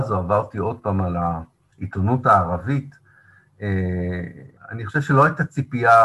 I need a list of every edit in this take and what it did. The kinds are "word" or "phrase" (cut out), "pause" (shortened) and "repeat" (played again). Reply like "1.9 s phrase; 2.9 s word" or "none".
4.6 s pause

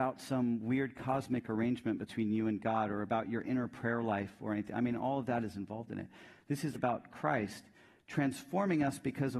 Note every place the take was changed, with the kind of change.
6.7 s word

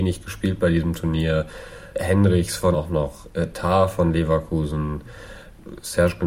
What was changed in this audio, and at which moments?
1.9 s word; 2.7 s word

